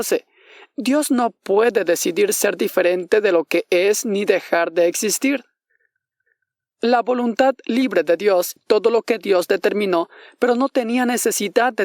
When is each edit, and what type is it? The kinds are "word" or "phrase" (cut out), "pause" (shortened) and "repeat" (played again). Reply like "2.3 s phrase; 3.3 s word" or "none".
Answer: 8.6 s word